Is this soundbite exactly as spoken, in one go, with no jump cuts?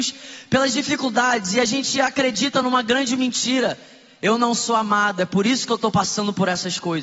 yes; 0 cuts

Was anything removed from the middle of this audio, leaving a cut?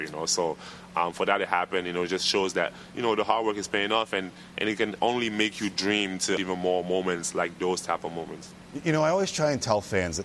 yes; 1 cut; at 6.4 s

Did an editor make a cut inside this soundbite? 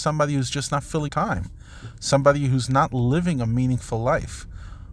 yes; 1 cut; at 1.1 s

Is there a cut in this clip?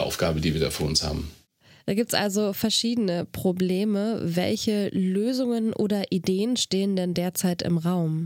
no; 0 cuts

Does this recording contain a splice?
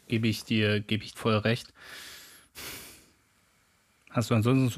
yes; 1 cut; at 1.1 s

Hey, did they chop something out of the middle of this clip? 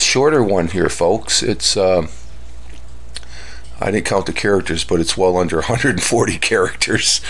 no; 0 cuts

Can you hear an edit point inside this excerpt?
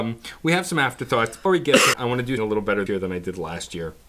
yes; 4 cuts; at 1.5 s, 1.9 s, 2.4 s, 2.9 s

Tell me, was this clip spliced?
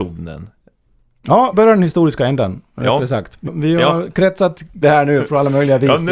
yes; 3 cuts; at 1.5 s, 3.5 s, 4.8 s

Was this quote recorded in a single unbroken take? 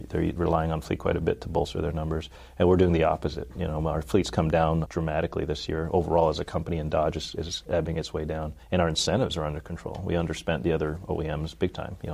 no; 2 cuts; at 4.8 s, 8.6 s

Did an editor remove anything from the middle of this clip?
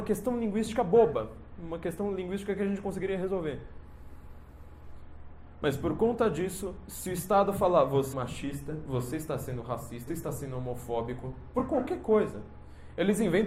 yes; 2 cuts; at 8.1 s, 10.1 s

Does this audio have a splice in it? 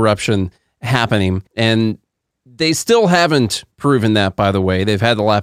yes; 2 cuts; at 1.5 s, 3.7 s

